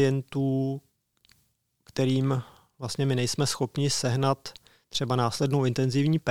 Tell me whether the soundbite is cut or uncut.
uncut